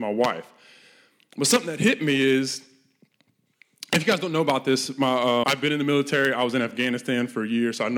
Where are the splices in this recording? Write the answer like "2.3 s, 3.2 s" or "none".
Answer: 5.4 s

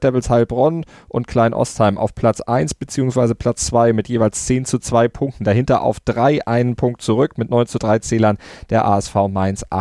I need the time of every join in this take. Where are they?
none

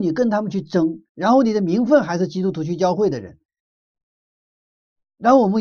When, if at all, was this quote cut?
1.1 s

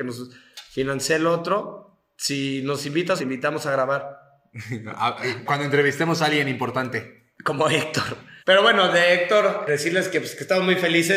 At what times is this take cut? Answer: 3.2 s, 5.5 s, 8.4 s, 9.7 s

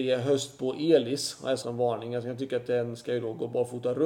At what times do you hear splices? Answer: 1.6 s

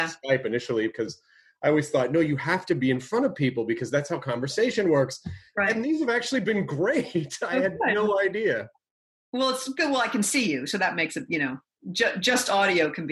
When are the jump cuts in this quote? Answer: none

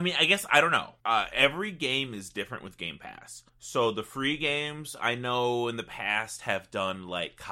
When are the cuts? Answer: 1.0 s, 3.5 s

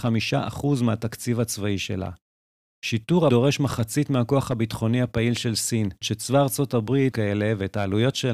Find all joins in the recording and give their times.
3.3 s, 6.0 s, 7.1 s

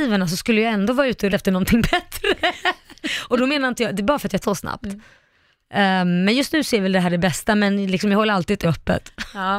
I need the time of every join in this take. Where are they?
1.3 s, 4.4 s, 8.6 s

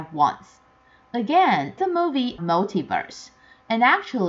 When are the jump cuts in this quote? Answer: 1.8 s, 2.4 s

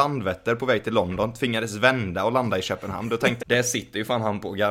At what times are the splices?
3.4 s

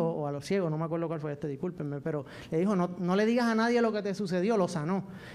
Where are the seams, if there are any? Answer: none

